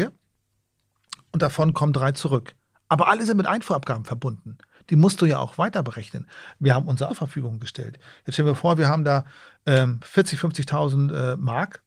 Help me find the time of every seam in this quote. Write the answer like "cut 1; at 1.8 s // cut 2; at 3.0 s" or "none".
cut 1; at 7.1 s